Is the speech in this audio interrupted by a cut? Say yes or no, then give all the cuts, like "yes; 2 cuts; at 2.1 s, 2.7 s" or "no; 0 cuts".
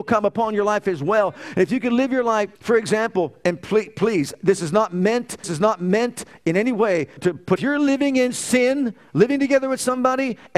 yes; 4 cuts; at 2.6 s, 5.4 s, 7.2 s, 7.6 s